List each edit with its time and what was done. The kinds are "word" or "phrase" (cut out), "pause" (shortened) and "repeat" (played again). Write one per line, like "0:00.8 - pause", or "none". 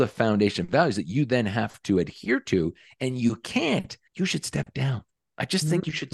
0:04.1 - pause